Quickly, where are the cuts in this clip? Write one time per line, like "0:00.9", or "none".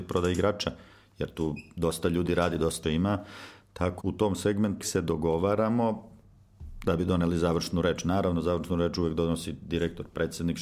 0:00.9
0:02.8
0:04.0
0:04.8